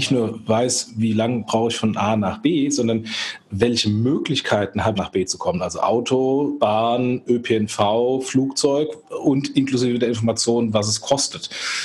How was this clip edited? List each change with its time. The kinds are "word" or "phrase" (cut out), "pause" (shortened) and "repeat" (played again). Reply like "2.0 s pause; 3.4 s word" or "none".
5.0 s phrase